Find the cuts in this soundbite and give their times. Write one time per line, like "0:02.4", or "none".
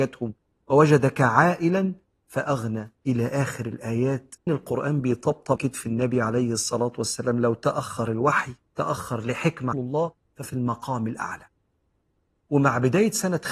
0:03.0
0:04.5
0:05.6
0:09.7